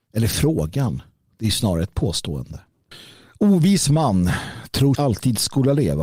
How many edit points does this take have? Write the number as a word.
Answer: one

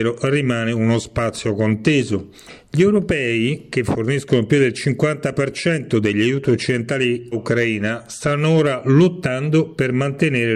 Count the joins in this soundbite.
one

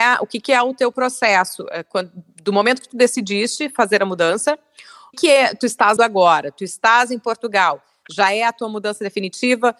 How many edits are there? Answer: two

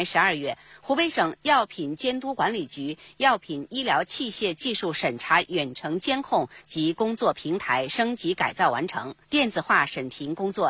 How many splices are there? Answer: one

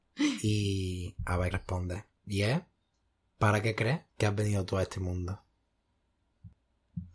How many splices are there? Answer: three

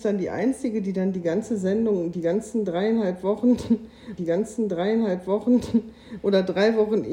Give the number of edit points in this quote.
one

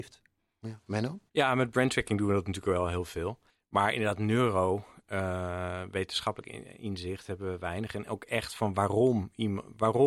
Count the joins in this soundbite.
two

